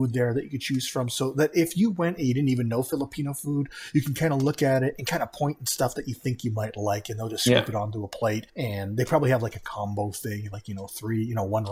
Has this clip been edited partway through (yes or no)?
yes